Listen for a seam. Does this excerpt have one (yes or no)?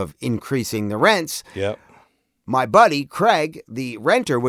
no